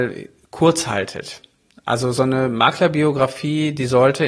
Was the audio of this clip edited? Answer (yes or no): no